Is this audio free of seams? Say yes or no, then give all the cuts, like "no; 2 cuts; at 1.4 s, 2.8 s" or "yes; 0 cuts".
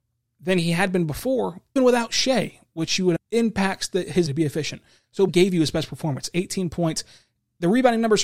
no; 4 cuts; at 1.8 s, 3.2 s, 4.3 s, 5.3 s